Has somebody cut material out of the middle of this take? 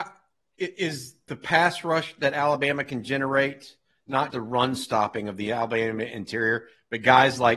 yes; 1 cut; at 4.3 s

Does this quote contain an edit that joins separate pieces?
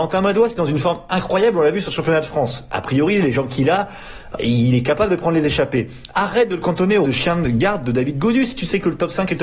yes; 1 cut; at 7.0 s

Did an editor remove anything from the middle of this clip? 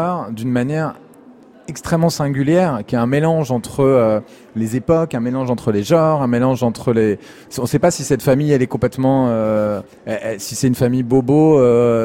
no; 0 cuts

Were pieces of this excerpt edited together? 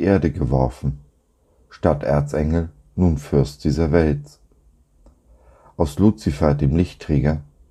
no; 0 cuts

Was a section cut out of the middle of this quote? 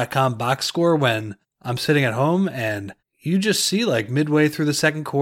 yes; 2 cuts; at 1.4 s, 3.0 s

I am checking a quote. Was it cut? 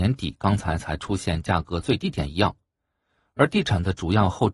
no; 0 cuts

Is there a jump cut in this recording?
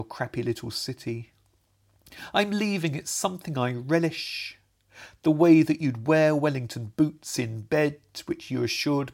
no; 0 cuts

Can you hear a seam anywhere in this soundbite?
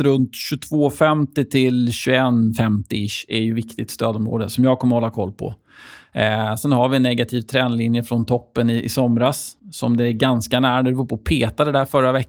yes; 1 cut; at 9.6 s

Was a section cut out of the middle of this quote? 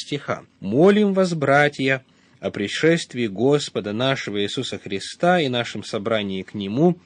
no; 0 cuts

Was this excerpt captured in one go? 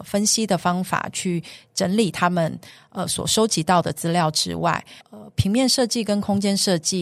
no; 1 cut; at 5.0 s

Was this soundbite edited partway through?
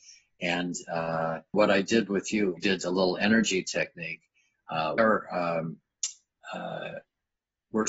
yes; 3 cuts; at 1.5 s, 2.6 s, 5.0 s

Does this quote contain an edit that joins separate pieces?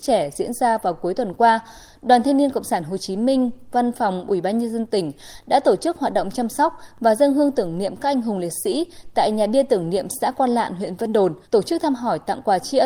yes; 1 cut; at 11.5 s

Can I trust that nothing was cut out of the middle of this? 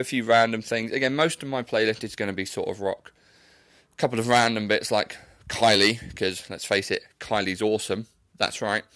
yes; 0 cuts

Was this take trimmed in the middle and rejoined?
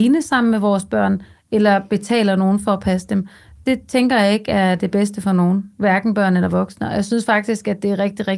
no; 0 cuts

